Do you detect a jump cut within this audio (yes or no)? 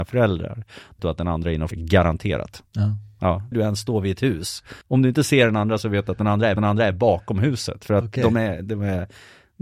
yes